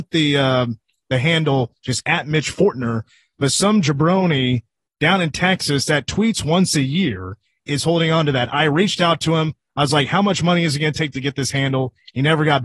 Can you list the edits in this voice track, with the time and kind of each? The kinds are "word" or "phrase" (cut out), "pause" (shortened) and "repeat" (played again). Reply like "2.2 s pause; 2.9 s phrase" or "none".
none

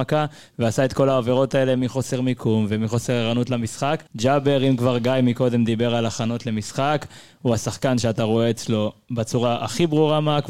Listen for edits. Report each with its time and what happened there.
4.1 s pause

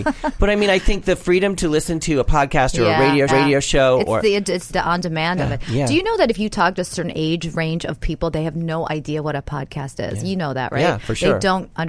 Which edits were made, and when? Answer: 3.3 s repeat; 4.7 s word; 5.4 s word

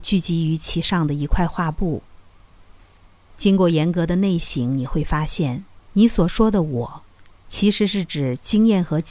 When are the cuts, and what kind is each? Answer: 5.8 s pause

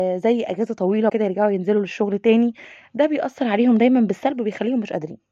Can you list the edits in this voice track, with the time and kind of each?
1.1 s word

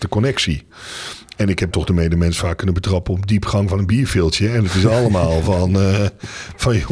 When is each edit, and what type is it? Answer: 1.7 s word

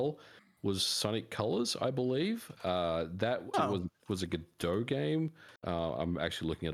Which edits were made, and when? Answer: 3.5 s word; 5.6 s pause

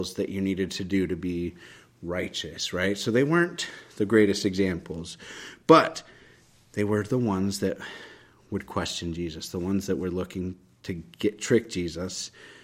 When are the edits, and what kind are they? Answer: none

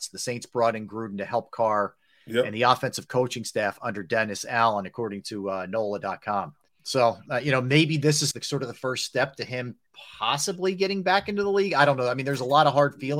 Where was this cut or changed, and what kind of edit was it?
6.7 s pause; 8.3 s phrase

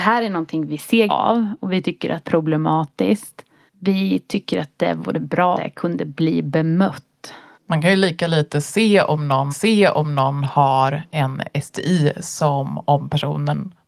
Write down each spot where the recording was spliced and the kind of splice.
1.1 s phrase; 2.2 s phrase; 3.7 s pause; 5.5 s word; 7.5 s pause; 9.5 s repeat

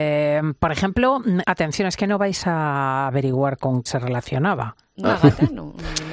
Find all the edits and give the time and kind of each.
1.4 s phrase; 3.9 s word; 5.0 s word

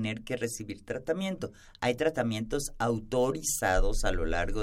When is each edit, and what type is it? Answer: none

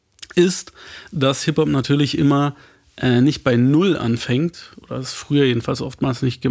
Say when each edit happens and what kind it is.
none

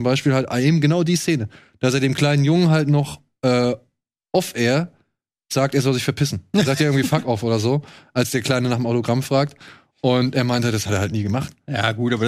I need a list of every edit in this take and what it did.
none

